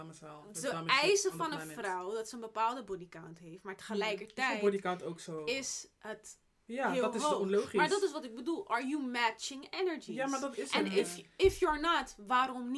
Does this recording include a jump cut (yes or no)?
no